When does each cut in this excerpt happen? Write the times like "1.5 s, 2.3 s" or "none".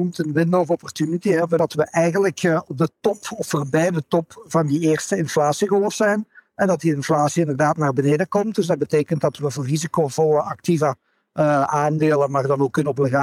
none